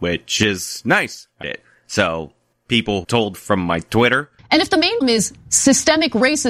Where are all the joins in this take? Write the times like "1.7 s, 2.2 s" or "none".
1.4 s, 2.5 s, 3.0 s, 3.3 s, 5.0 s